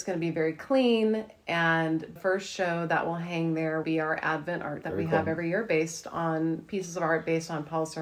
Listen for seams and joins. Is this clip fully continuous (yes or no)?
no